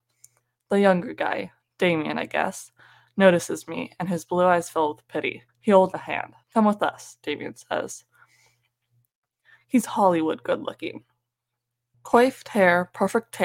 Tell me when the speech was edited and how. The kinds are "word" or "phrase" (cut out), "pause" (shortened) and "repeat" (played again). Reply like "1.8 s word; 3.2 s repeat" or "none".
5.5 s pause; 5.9 s word; 6.4 s pause